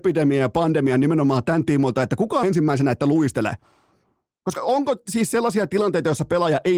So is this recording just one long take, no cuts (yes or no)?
no